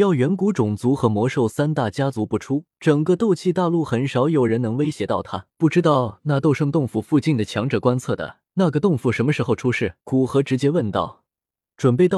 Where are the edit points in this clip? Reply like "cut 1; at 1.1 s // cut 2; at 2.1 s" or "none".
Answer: cut 1; at 2.7 s // cut 2; at 5.5 s // cut 3; at 8.5 s // cut 4; at 10.0 s